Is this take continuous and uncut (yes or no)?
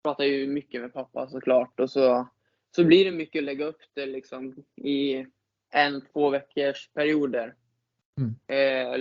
yes